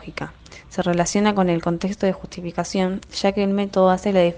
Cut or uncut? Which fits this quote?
uncut